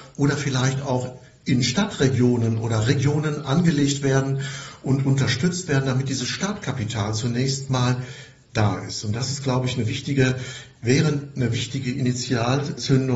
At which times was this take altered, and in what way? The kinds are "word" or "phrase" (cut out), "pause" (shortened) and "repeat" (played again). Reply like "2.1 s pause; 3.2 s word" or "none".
none

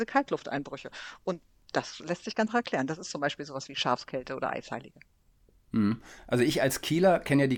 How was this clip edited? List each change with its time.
2.5 s word

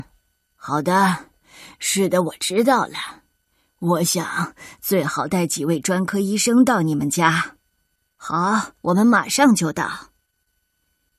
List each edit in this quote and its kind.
8.8 s pause

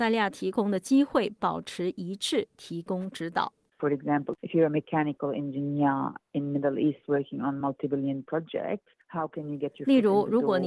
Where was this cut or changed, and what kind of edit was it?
none

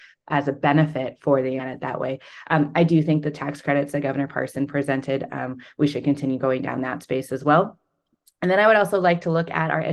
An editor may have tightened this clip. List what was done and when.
1.6 s phrase

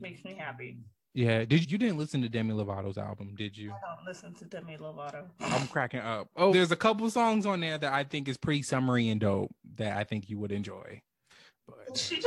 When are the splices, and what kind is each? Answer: 1.6 s word; 6.5 s word

